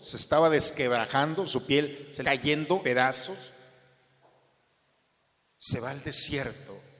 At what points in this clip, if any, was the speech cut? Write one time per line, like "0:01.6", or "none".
0:02.2
0:02.8

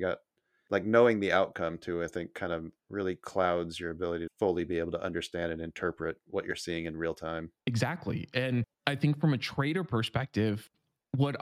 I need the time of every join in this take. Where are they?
0:02.8
0:04.3
0:07.6
0:08.7

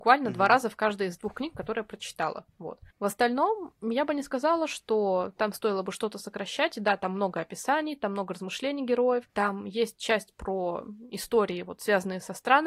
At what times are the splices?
0:02.9
0:09.3

